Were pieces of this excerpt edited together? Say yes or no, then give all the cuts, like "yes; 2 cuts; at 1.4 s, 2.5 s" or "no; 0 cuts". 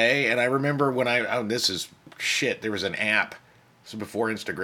no; 0 cuts